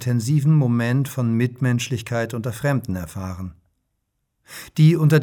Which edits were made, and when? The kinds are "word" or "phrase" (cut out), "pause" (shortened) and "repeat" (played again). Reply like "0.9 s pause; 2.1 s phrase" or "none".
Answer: none